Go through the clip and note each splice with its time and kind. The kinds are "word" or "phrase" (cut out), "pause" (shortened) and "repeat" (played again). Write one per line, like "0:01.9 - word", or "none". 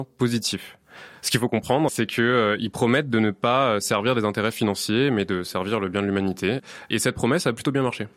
0:01.9 - word